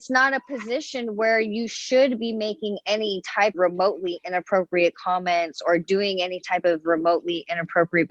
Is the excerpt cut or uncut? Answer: cut